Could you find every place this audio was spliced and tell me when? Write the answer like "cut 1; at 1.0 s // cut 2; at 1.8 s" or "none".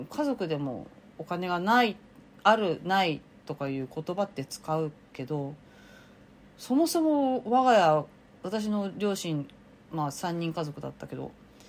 none